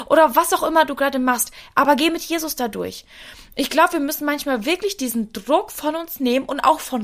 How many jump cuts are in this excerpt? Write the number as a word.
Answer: zero